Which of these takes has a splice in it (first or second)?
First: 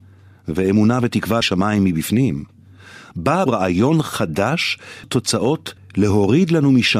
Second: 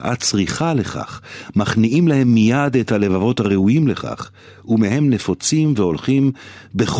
first